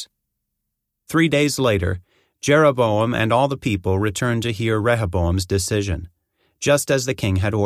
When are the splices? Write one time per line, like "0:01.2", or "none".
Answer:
none